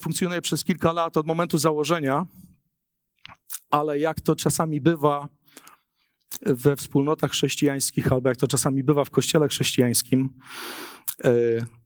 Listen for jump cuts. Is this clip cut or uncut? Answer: uncut